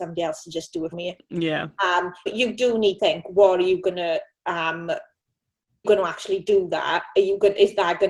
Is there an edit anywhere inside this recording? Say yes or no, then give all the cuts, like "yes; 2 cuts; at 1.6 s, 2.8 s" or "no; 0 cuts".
yes; 4 cuts; at 0.9 s, 2.3 s, 3.0 s, 5.8 s